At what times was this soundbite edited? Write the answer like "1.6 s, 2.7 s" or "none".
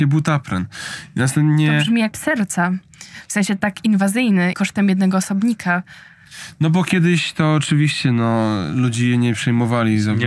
2.1 s, 4.5 s